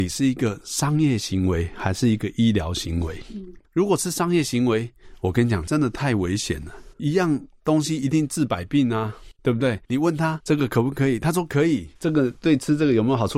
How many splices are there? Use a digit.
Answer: 4